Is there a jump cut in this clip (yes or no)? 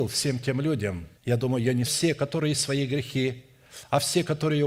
yes